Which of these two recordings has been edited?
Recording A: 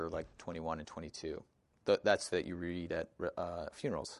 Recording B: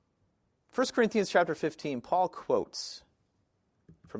A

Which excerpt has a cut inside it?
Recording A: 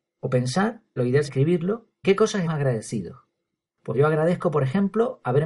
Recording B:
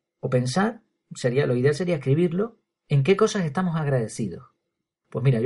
A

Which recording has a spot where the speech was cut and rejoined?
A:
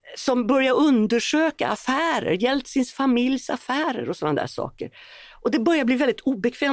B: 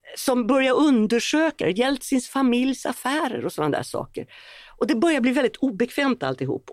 B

